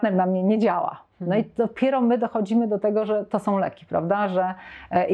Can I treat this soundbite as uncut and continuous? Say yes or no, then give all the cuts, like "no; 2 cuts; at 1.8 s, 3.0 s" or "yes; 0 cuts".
yes; 0 cuts